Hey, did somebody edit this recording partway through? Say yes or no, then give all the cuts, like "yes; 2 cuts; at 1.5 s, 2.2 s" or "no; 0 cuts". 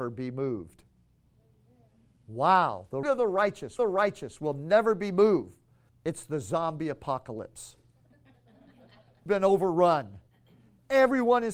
yes; 4 cuts; at 3.0 s, 3.8 s, 5.9 s, 9.3 s